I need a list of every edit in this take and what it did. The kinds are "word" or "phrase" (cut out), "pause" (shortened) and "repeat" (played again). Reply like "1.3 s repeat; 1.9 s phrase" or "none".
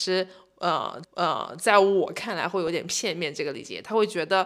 1.0 s repeat